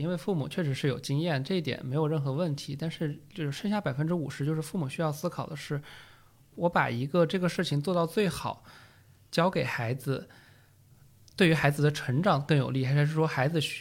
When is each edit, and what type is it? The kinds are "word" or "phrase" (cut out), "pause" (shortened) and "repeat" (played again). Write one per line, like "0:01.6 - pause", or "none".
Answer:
none